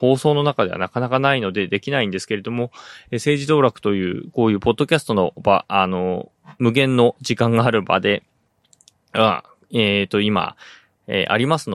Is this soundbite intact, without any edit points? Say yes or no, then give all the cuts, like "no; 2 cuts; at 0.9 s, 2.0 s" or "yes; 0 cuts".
yes; 0 cuts